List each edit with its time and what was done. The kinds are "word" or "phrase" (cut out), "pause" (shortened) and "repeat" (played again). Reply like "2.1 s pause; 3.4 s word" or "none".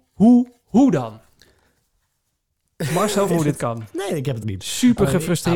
3.3 s word; 4.4 s word